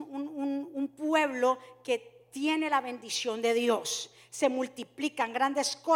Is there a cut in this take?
no; 0 cuts

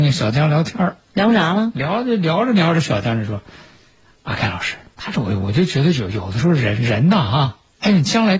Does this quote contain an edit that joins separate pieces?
yes; 1 cut; at 4.9 s

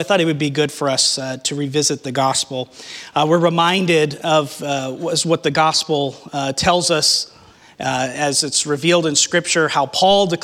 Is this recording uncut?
yes; 0 cuts

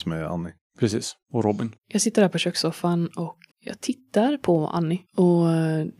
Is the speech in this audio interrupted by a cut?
yes; 4 cuts; at 1.2 s, 1.8 s, 3.5 s, 5.1 s

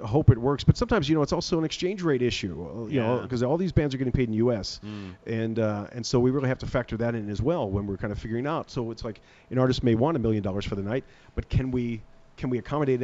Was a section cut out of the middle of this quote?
no; 0 cuts

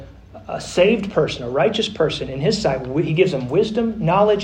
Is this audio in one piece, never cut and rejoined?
yes; 0 cuts

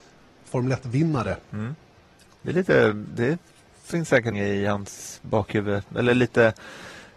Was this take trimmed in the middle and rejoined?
yes; 1 cut; at 4.3 s

